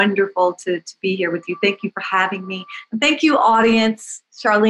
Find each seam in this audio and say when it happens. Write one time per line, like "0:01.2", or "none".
none